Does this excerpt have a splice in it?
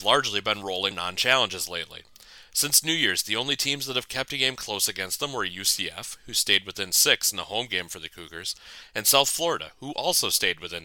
yes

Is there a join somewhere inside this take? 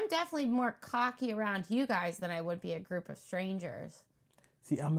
no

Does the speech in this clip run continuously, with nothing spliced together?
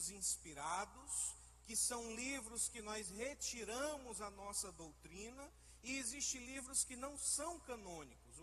yes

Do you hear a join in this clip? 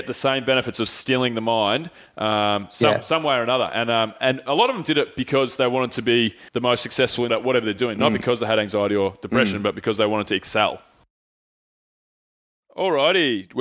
yes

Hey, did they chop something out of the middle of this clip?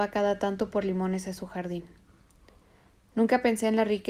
no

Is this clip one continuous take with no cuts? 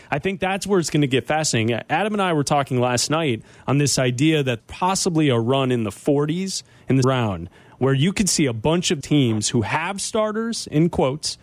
no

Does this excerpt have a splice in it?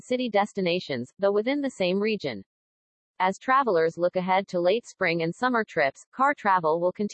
no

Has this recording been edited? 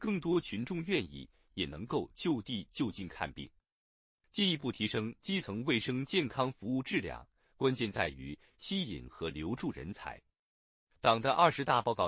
no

